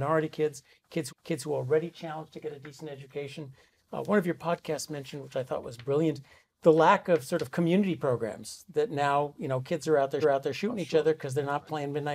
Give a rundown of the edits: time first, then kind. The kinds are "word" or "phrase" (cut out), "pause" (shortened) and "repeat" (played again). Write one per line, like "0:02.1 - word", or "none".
0:01.1 - repeat
0:10.2 - repeat